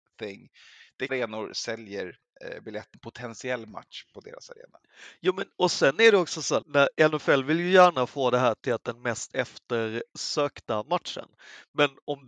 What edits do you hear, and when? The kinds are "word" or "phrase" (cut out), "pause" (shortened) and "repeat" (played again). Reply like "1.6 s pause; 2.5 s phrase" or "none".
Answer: 1.1 s phrase; 2.9 s phrase; 6.6 s word